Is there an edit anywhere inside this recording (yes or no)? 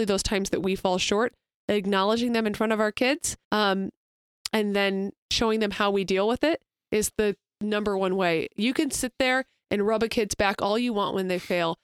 yes